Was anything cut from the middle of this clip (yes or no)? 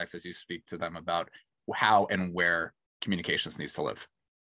no